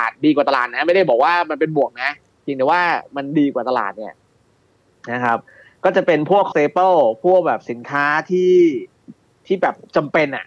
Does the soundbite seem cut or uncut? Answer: cut